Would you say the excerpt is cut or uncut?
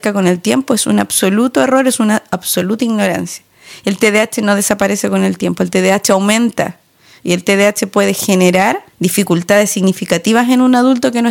cut